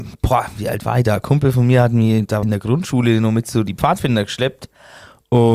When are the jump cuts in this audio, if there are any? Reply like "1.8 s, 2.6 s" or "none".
2.4 s